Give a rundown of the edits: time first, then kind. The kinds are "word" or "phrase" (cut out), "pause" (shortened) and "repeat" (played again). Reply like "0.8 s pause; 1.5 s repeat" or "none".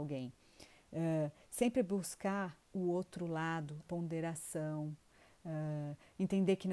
3.9 s word